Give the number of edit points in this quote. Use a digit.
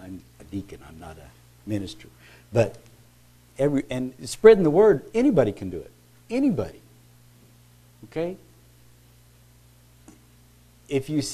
1